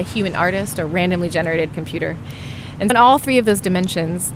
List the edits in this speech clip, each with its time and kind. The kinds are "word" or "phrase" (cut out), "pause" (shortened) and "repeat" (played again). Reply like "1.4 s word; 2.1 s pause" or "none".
1.7 s phrase; 2.9 s word